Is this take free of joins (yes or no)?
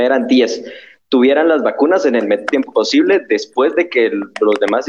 no